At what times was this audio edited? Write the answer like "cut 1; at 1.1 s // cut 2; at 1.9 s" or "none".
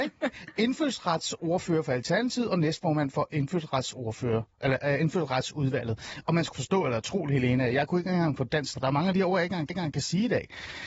cut 1; at 6.5 s // cut 2; at 8.7 s // cut 3; at 9.7 s